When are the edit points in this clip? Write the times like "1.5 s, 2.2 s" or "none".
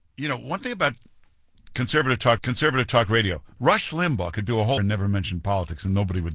2.4 s, 4.8 s